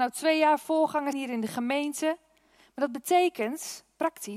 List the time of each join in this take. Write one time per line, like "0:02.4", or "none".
0:01.1